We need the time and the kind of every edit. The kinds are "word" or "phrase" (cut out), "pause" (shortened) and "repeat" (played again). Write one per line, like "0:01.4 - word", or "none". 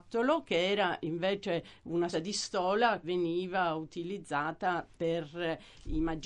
0:02.1 - word
0:03.0 - word
0:04.9 - word